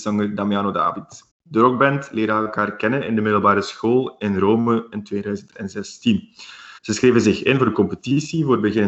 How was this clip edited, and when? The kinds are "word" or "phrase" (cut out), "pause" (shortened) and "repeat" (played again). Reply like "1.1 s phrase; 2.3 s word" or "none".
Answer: 1.3 s pause; 6.8 s pause